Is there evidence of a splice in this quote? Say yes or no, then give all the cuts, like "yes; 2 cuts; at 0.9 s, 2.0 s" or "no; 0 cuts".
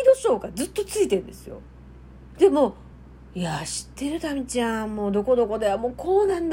no; 0 cuts